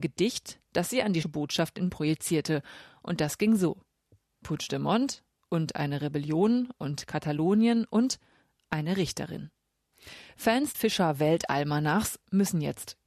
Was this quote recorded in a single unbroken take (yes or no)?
no